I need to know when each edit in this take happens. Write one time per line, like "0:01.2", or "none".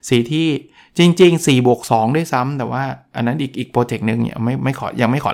none